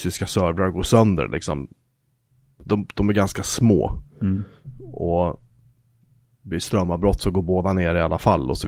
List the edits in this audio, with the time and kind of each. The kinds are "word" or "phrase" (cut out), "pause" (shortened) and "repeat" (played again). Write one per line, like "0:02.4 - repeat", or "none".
none

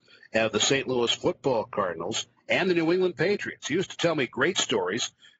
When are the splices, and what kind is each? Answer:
none

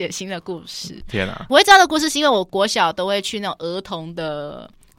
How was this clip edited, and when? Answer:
0:01.0 - word

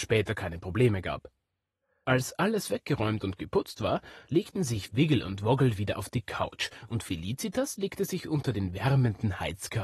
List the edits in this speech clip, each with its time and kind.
none

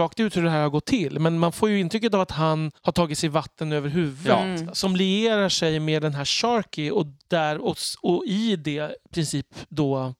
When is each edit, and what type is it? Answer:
0:02.8 - pause

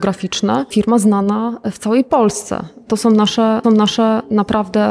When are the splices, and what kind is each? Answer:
0:03.6 - repeat

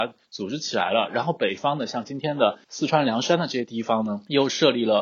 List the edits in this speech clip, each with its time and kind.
0:02.6 - pause

